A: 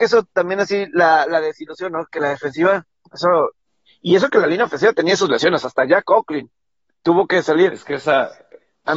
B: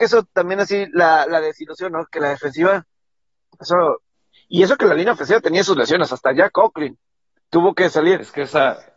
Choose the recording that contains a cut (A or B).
A